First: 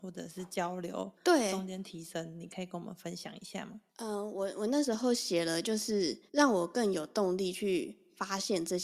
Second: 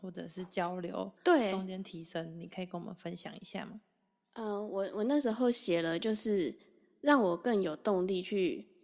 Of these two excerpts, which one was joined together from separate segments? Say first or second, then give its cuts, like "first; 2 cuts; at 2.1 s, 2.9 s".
first; 2 cuts; at 3.9 s, 6.3 s